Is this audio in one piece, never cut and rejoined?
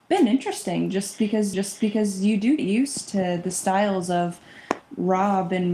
no; 2 cuts; at 1.5 s, 2.6 s

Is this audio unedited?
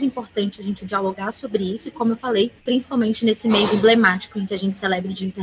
no; 1 cut; at 2.6 s

